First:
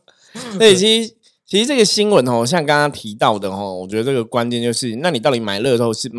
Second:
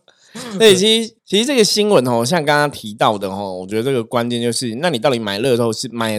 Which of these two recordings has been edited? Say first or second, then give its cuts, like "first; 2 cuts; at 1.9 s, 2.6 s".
second; 1 cut; at 1.2 s